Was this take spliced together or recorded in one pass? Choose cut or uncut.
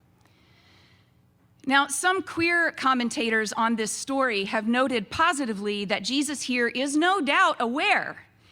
uncut